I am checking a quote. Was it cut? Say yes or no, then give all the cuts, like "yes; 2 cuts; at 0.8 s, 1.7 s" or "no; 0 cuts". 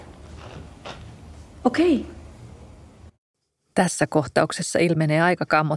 yes; 1 cut; at 3.1 s